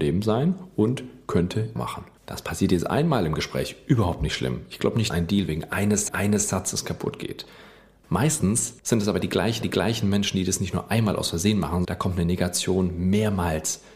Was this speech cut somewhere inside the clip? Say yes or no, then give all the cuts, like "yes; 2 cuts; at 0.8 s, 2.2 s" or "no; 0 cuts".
yes; 7 cuts; at 1.8 s, 2.1 s, 5.1 s, 6.1 s, 8.8 s, 9.6 s, 11.8 s